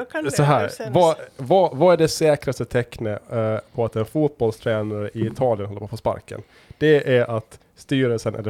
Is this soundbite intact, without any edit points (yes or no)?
yes